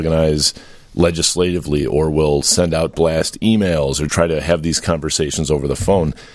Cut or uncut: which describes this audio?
cut